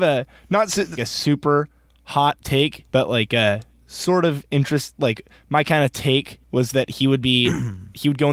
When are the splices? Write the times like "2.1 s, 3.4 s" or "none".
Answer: 1.0 s, 2.9 s, 6.4 s